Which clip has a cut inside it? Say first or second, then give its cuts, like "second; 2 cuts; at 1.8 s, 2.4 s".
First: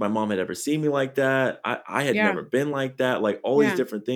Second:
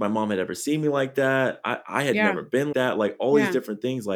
second; 1 cut; at 2.7 s